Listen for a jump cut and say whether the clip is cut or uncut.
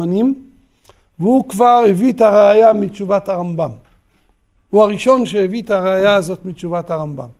uncut